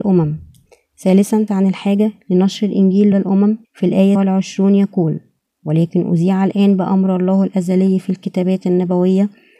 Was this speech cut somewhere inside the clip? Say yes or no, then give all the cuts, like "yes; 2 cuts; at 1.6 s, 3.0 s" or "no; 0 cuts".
yes; 4 cuts; at 1.5 s, 3.1 s, 3.6 s, 4.1 s